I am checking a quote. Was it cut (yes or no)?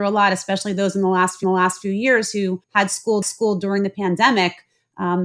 yes